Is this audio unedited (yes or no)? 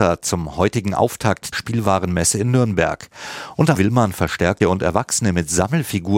no